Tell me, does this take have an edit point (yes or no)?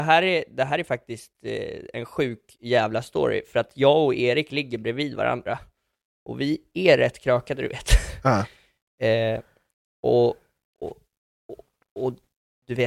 no